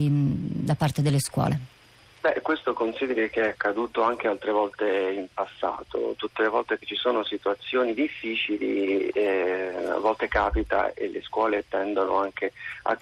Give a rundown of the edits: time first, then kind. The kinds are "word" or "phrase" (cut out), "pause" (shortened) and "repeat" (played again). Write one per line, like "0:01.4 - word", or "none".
none